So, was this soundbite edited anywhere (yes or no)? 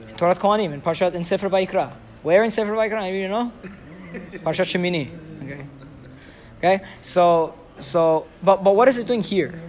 yes